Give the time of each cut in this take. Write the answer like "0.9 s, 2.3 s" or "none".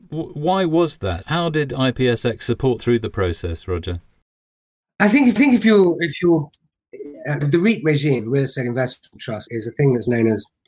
1.2 s, 2.8 s, 5.4 s, 7.4 s, 9.5 s